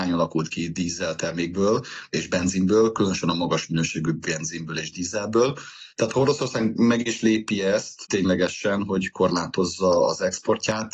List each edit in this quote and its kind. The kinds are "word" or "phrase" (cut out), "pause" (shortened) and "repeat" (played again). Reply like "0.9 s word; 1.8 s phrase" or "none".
5.9 s pause